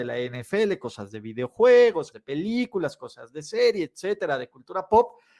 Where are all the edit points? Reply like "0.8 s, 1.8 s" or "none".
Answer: 2.1 s